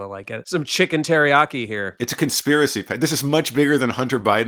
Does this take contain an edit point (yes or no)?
no